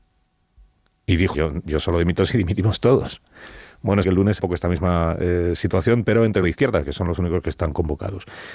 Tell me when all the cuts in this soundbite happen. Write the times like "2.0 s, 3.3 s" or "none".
1.3 s, 4.0 s, 4.4 s, 6.4 s